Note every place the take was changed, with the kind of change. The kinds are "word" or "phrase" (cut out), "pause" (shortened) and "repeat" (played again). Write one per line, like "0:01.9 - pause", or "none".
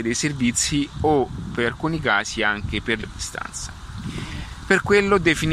0:03.0 - phrase